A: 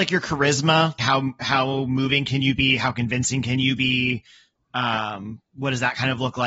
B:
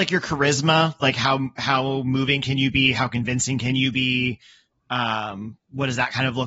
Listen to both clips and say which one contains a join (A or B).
A